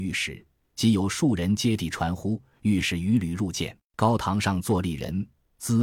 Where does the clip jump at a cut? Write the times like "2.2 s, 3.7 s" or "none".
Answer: 3.8 s